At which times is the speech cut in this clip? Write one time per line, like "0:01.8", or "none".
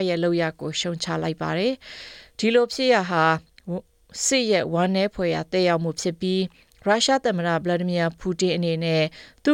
none